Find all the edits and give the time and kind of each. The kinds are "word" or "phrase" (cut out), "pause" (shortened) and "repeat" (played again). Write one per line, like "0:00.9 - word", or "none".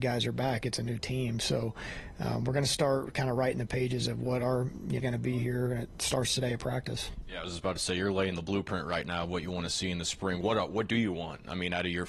0:05.0 - phrase